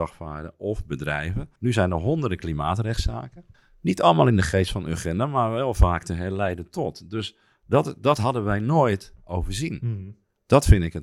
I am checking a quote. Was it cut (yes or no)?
yes